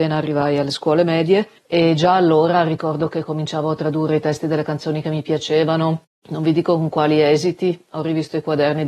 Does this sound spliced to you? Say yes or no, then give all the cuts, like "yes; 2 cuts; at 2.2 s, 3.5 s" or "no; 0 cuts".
yes; 1 cut; at 1.6 s